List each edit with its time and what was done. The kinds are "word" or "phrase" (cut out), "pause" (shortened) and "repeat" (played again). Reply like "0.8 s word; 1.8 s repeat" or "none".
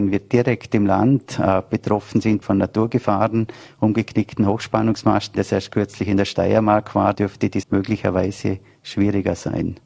2.4 s word; 5.3 s word; 7.1 s word; 7.6 s word